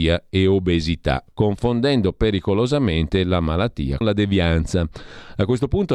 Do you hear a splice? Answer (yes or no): yes